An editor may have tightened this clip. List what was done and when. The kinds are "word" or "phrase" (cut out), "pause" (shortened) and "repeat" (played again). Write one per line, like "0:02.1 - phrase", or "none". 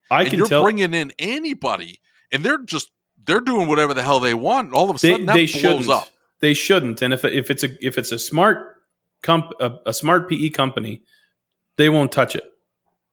none